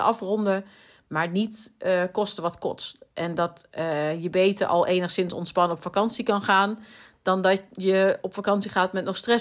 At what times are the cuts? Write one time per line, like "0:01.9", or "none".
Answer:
none